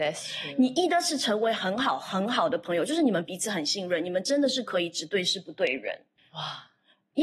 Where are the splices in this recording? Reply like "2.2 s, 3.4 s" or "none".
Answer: 6.2 s